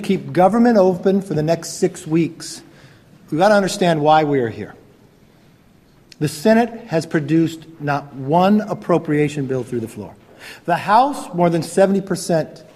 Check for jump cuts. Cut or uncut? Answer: uncut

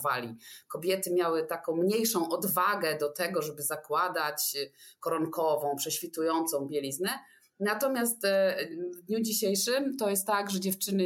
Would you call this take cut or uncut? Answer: uncut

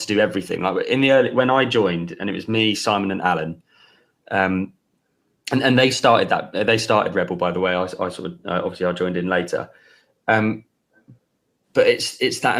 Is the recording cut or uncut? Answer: uncut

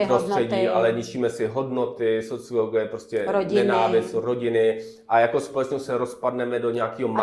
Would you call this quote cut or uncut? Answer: uncut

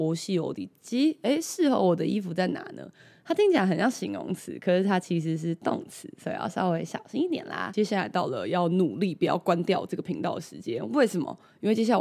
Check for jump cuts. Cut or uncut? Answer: uncut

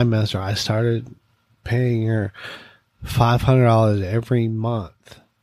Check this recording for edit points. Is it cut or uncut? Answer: uncut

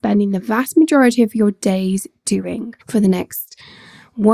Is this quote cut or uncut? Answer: cut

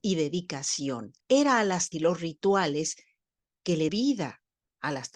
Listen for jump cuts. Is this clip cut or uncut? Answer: cut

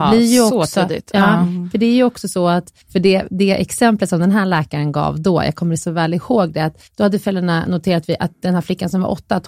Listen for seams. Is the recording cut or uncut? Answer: cut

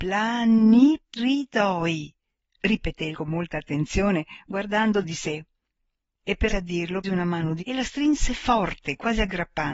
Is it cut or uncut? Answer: cut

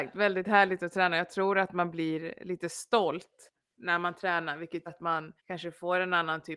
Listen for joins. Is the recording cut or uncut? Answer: cut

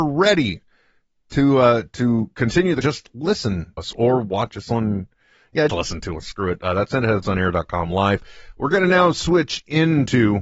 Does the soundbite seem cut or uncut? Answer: cut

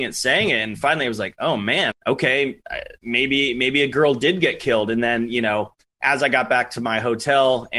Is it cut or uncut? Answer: cut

